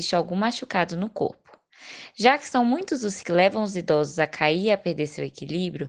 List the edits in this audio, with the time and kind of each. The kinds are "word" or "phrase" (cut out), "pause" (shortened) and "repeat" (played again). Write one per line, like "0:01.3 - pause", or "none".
0:03.2 - word